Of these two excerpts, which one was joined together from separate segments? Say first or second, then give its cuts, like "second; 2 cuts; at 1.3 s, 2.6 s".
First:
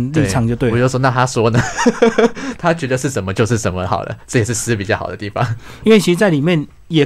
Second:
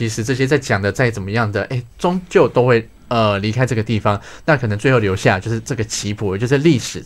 second; 2 cuts; at 1.9 s, 3.0 s